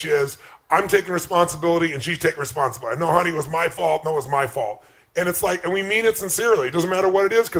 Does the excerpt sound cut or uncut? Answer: uncut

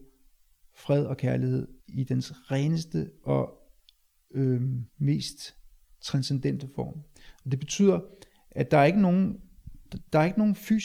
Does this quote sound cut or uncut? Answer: cut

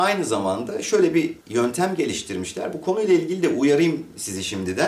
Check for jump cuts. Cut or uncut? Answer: cut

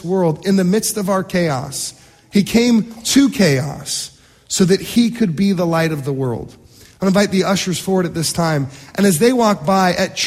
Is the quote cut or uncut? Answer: uncut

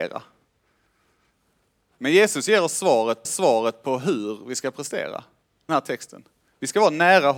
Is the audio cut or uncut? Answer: cut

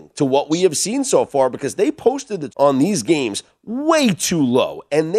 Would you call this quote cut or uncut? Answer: cut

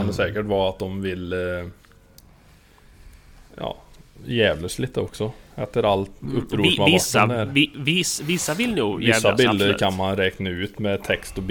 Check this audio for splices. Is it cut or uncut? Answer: uncut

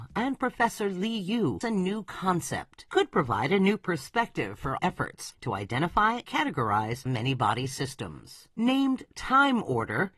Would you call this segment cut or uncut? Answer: cut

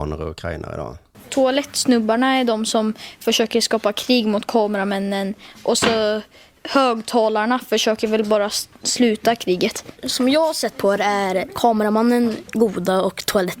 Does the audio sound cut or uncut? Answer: uncut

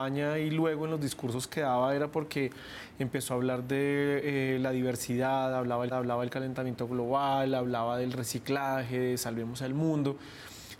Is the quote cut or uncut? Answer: cut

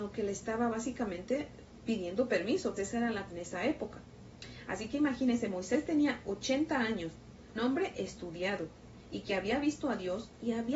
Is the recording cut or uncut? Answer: cut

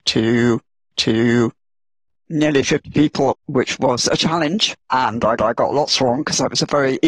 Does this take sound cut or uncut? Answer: cut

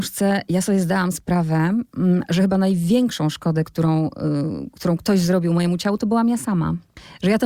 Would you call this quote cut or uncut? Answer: uncut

